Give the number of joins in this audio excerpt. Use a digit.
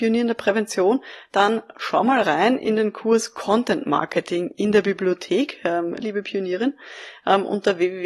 1